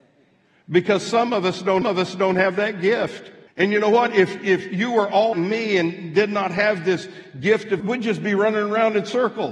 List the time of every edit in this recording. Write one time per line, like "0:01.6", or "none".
0:01.8
0:03.5
0:05.3
0:07.8